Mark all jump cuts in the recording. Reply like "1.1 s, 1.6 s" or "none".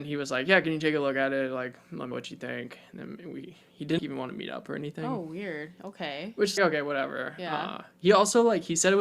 2.1 s, 4.0 s, 6.6 s